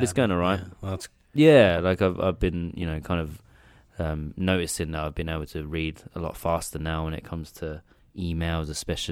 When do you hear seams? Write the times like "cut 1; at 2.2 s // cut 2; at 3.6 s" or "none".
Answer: none